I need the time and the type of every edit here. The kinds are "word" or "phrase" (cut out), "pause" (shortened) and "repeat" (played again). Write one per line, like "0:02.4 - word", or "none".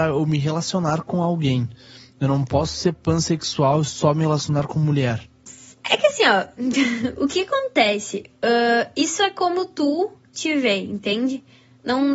none